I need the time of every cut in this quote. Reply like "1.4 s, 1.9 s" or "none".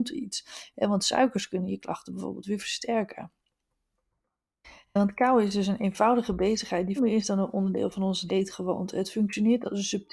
7.0 s, 8.3 s